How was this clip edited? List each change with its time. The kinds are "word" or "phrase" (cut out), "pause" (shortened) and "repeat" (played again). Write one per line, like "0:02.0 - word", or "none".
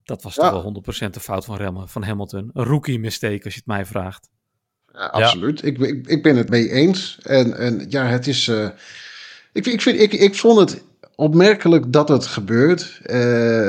0:06.5 - word